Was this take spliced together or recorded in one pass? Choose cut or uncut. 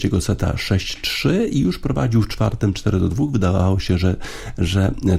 uncut